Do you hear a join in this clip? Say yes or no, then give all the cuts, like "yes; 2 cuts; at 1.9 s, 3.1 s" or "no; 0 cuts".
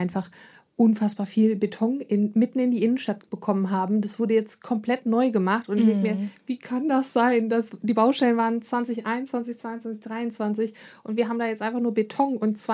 no; 0 cuts